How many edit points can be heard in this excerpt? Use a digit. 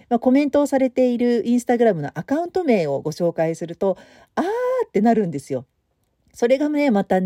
0